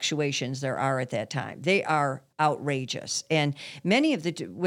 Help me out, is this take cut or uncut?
cut